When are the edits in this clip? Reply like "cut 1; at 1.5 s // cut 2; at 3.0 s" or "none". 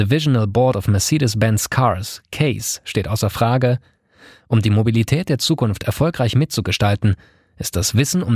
none